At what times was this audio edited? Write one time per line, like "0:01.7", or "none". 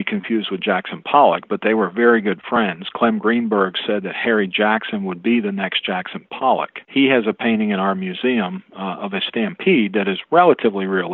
0:06.8